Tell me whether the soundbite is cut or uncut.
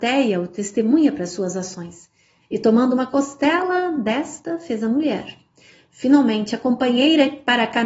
uncut